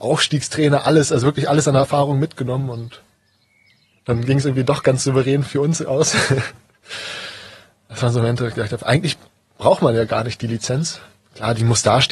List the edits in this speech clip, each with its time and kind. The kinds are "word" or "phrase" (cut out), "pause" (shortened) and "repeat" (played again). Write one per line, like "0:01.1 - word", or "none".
none